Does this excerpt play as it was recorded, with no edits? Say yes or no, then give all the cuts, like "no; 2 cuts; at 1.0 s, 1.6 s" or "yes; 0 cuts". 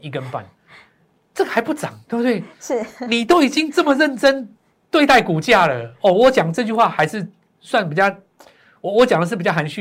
yes; 0 cuts